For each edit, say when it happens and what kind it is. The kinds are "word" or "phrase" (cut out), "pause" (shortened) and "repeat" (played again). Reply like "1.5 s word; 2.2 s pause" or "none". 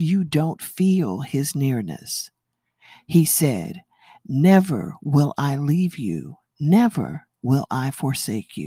none